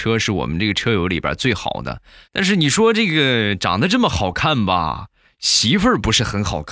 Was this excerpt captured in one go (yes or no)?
yes